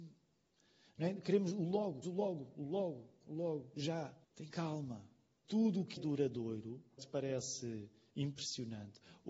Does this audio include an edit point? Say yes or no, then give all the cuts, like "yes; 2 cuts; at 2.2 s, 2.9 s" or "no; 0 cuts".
yes; 6 cuts; at 2.0 s, 3.2 s, 4.2 s, 5.4 s, 6.0 s, 7.0 s